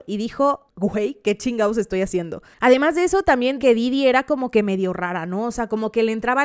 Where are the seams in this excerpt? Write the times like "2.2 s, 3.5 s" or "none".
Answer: 3.6 s